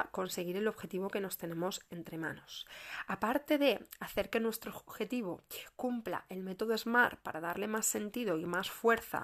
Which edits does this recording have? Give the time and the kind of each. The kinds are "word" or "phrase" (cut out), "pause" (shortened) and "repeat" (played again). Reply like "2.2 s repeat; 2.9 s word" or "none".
none

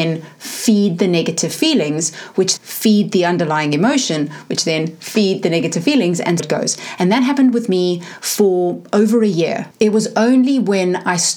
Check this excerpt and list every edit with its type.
2.6 s word; 6.4 s word; 9.7 s pause

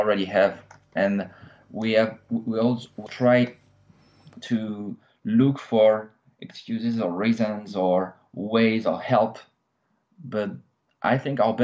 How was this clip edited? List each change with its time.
3.1 s word

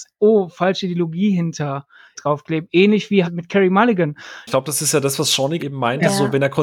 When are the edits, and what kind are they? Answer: 2.1 s word; 3.2 s word; 5.6 s word

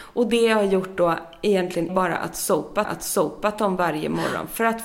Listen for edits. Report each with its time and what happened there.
1.9 s word; 2.8 s repeat

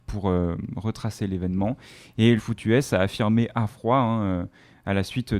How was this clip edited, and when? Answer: 2.4 s phrase

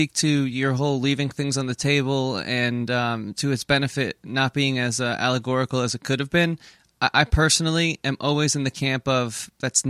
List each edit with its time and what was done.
none

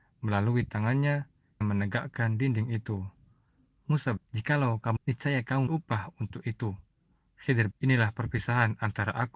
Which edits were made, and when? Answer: 1.6 s word; 4.2 s word; 5.0 s word; 5.7 s word; 7.7 s word

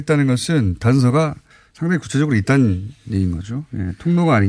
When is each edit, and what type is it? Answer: 1.5 s pause

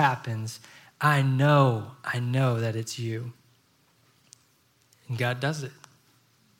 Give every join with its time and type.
none

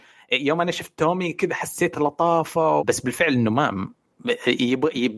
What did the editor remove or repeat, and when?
1.9 s word; 2.8 s word

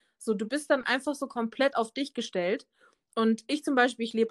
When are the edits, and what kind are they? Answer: none

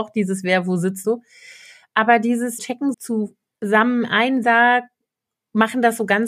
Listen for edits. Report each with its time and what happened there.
1.0 s word; 2.6 s word; 2.9 s word; 4.4 s word

